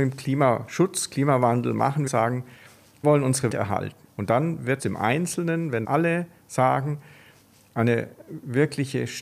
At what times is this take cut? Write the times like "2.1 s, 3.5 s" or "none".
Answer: 2.1 s, 3.0 s, 3.5 s, 4.8 s, 5.8 s